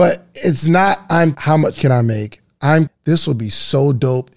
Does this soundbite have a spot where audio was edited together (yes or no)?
yes